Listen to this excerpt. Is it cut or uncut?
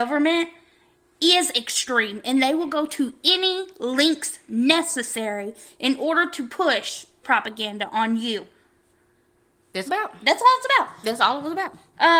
cut